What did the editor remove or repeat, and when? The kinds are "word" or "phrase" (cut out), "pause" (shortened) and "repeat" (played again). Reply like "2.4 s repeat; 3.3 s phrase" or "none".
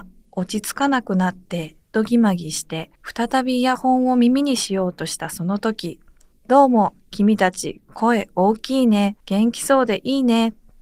1.8 s pause; 3.0 s pause; 6.3 s word; 9.2 s pause